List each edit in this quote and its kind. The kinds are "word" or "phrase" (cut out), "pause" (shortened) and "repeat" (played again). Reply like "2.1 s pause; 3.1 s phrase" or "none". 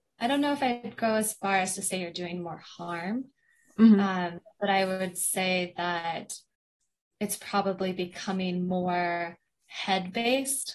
none